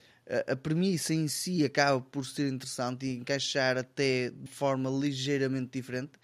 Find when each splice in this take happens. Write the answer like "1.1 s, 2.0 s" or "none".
4.5 s

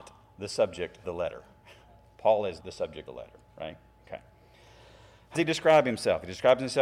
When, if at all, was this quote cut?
1.0 s, 2.6 s, 3.1 s, 5.3 s

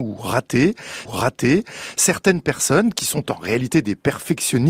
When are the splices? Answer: 1.1 s

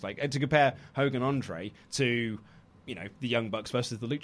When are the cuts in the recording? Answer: none

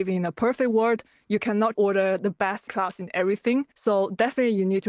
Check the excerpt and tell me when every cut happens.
1.7 s, 2.7 s, 3.7 s

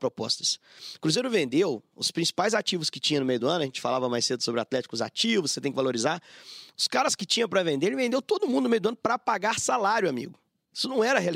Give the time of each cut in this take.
none

